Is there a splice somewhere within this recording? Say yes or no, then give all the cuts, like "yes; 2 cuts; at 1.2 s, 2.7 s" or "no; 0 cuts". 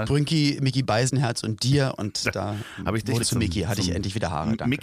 yes; 1 cut; at 3.2 s